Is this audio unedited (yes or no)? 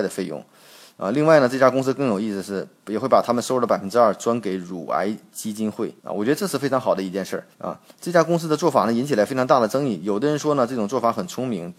no